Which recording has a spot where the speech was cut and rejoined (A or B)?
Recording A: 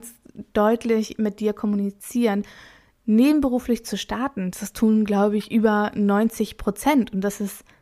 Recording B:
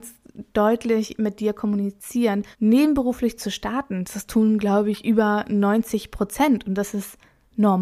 B